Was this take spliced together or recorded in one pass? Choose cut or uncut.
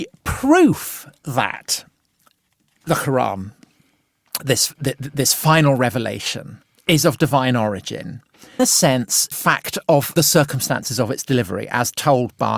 cut